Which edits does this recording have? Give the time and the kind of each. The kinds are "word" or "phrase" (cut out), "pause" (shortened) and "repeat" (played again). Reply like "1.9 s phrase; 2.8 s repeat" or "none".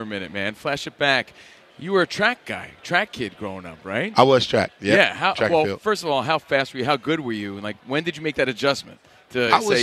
none